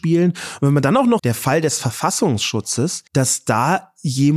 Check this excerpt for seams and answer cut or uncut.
cut